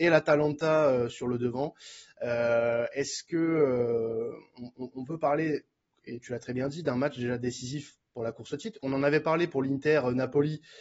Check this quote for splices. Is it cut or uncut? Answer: uncut